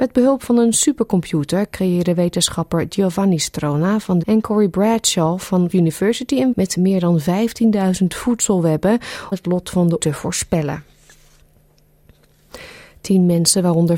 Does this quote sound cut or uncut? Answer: cut